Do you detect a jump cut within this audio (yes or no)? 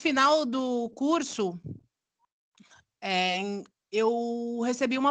no